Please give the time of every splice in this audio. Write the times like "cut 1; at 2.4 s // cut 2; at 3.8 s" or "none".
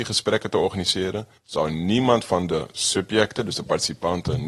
cut 1; at 1.4 s